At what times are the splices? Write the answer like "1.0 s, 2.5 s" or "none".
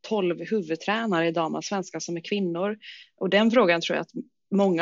none